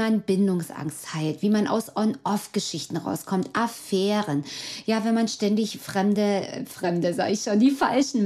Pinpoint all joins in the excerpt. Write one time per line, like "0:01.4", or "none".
none